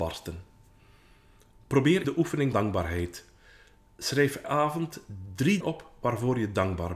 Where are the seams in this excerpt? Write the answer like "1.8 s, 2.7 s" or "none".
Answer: 2.0 s, 2.5 s, 4.4 s, 5.6 s